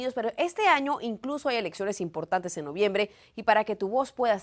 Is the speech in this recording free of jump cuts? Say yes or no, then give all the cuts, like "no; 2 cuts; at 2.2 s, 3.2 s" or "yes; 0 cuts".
yes; 0 cuts